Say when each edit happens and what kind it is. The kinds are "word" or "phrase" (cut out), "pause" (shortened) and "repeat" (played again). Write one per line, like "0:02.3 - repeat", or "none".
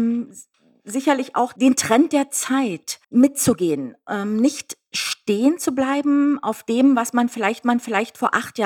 0:03.0 - pause
0:07.6 - repeat